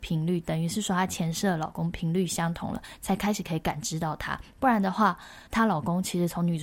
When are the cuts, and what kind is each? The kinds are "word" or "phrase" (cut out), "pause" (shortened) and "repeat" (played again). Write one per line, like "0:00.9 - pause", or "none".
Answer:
0:05.5 - pause